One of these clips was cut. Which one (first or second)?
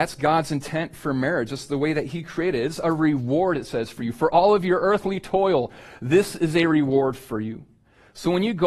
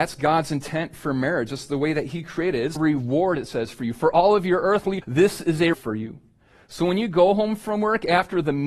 second